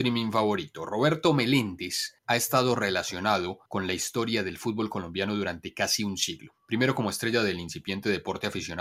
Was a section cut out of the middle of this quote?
yes; 3 cuts; at 2.2 s, 3.7 s, 6.6 s

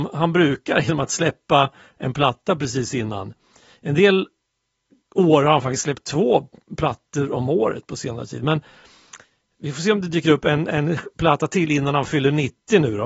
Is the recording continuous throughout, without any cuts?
yes; 0 cuts

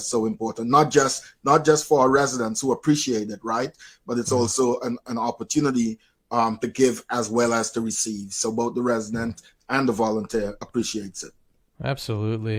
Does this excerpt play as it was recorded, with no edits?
yes; 0 cuts

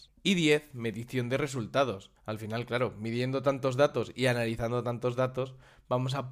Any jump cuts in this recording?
yes; 1 cut; at 2.2 s

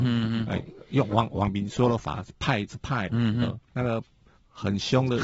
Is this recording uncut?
no; 1 cut; at 3.1 s

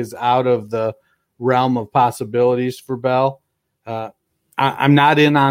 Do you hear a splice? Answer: no; 0 cuts

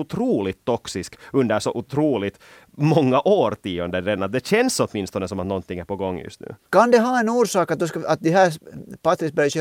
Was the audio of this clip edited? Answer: no; 0 cuts

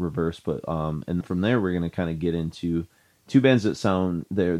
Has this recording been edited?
yes; 1 cut; at 1.2 s

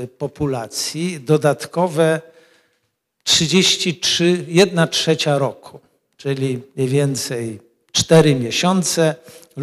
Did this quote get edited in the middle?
no; 0 cuts

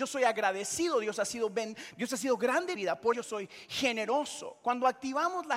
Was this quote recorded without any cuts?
no; 2 cuts; at 2.8 s, 3.1 s

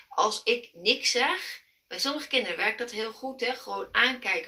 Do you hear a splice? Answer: no; 0 cuts

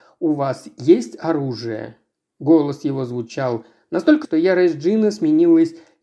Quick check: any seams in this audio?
yes; 1 cut; at 4.2 s

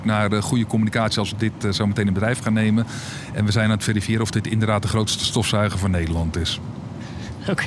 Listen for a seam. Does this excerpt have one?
no; 0 cuts

